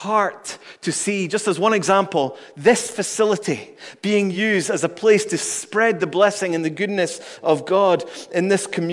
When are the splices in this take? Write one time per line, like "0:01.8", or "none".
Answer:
none